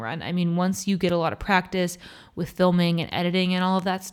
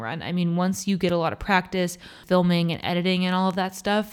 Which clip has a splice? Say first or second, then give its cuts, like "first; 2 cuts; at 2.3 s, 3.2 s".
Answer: second; 1 cut; at 2.2 s